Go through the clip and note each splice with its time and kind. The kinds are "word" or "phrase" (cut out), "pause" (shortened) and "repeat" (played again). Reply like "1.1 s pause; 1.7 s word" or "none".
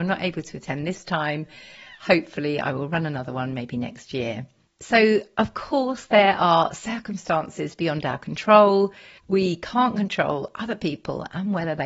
4.7 s pause; 9.2 s pause

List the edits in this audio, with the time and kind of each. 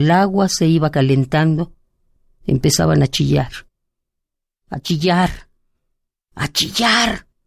none

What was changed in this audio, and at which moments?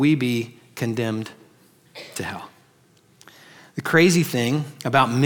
none

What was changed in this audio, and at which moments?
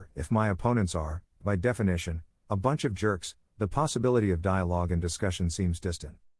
none

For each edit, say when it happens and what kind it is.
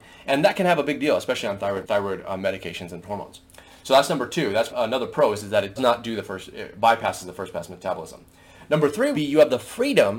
1.8 s word; 3.0 s word; 4.7 s word; 5.8 s word; 9.1 s word

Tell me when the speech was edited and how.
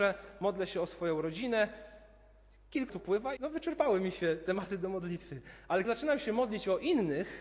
2.9 s word; 3.4 s word; 5.8 s word

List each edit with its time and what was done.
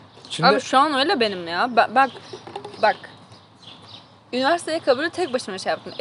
none

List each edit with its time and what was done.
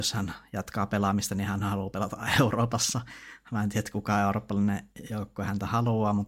none

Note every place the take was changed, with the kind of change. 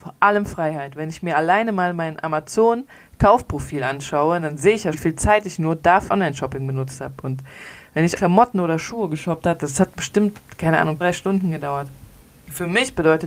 4.9 s word; 6.1 s word; 8.2 s word; 11.0 s word; 12.2 s pause

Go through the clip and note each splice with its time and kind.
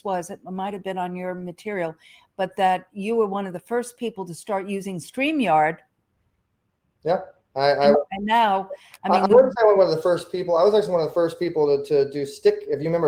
7.9 s word

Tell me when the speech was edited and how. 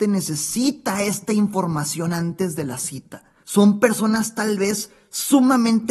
3.4 s pause

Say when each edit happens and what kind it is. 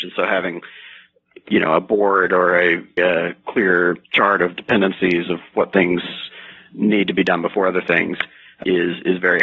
3.0 s word; 4.0 s pause

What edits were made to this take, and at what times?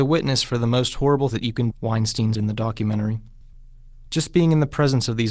1.3 s word; 1.7 s word; 2.3 s word

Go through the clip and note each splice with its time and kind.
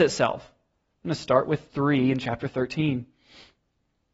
1.7 s word

